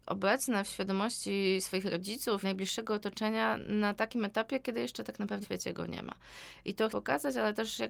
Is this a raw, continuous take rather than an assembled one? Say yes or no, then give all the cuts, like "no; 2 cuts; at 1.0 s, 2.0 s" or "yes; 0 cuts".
no; 3 cuts; at 2.4 s, 5.4 s, 6.9 s